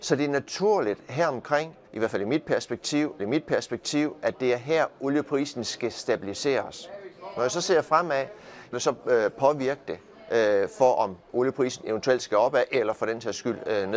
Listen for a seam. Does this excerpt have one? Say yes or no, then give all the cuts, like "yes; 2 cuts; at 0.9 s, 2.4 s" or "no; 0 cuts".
yes; 3 cuts; at 1.8 s, 3.2 s, 8.7 s